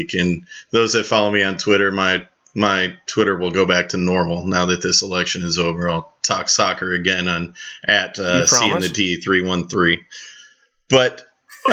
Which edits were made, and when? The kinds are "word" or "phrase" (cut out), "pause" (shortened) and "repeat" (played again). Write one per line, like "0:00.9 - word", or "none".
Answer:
none